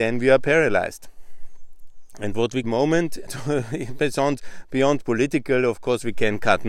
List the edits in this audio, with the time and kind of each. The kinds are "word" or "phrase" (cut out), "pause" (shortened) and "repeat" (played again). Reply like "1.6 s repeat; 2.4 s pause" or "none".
2.6 s phrase; 3.3 s word